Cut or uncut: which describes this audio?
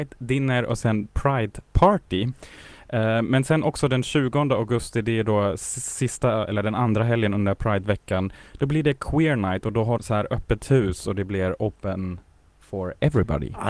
cut